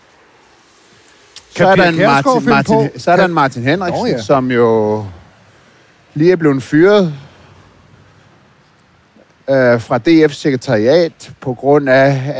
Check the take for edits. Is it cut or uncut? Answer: uncut